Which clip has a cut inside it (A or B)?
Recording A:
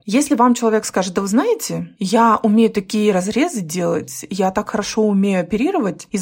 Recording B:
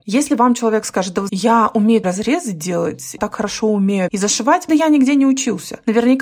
B